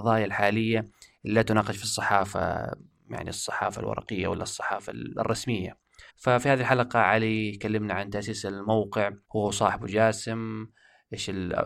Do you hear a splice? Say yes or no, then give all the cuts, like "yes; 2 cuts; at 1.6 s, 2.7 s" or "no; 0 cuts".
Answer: yes; 2 cuts; at 6.1 s, 9.2 s